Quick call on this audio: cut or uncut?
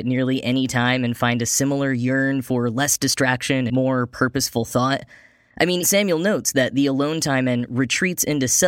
cut